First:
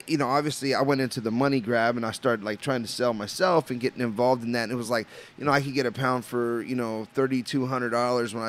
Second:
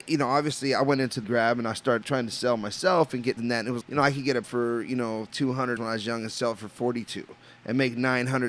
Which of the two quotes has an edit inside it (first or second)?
second